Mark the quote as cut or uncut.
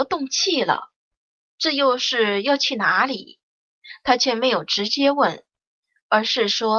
uncut